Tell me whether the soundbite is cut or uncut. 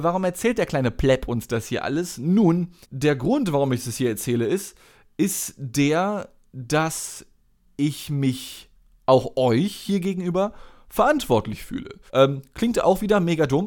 cut